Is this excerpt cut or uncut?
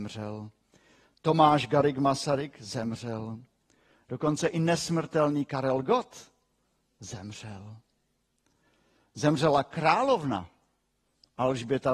uncut